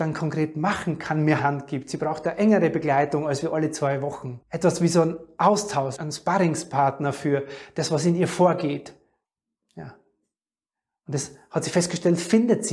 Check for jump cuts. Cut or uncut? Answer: cut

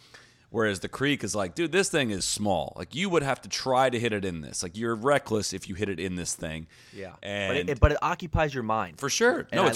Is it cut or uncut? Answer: uncut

